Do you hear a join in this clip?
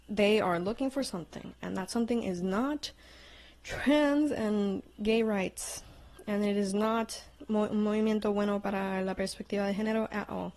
no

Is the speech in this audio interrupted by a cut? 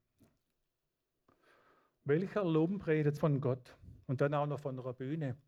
yes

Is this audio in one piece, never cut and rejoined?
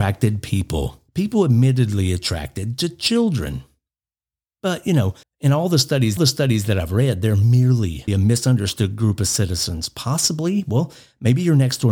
no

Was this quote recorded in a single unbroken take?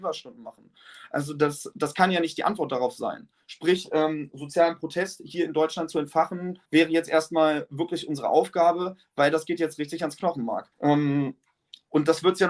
no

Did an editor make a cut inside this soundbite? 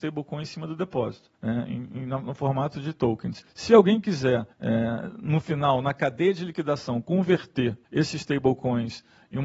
yes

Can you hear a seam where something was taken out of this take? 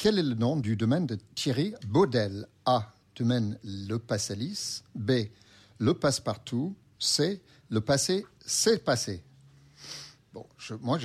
no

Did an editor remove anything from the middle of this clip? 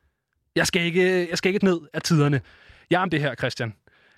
yes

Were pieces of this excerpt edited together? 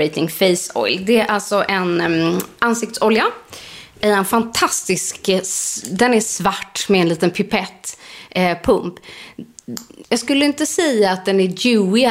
yes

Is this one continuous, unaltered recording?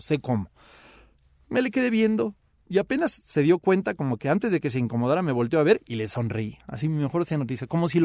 yes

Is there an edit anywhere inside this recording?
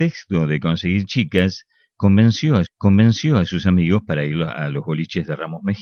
yes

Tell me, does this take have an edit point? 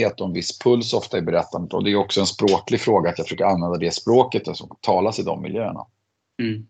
no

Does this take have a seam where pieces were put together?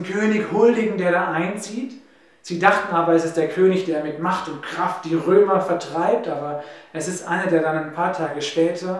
no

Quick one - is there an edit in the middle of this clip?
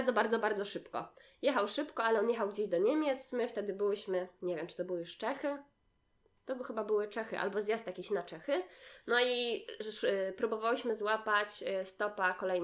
no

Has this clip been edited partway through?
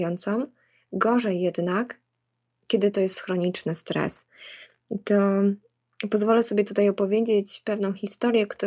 no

